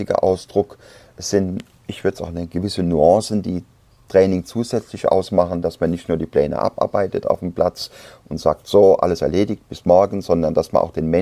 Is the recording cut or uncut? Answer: uncut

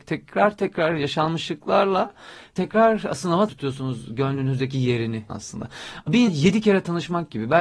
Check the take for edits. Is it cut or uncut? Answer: cut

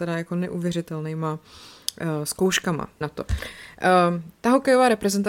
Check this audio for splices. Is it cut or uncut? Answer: cut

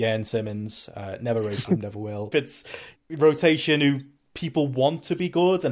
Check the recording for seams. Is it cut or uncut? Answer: cut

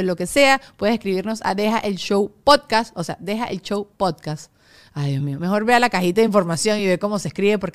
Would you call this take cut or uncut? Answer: uncut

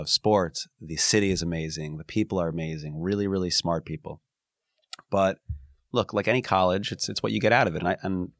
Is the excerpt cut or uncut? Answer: uncut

